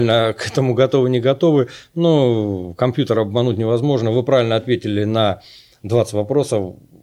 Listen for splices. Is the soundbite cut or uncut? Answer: uncut